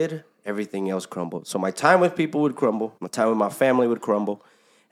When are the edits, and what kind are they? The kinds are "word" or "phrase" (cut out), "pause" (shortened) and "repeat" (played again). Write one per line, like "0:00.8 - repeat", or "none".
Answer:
0:03.0 - pause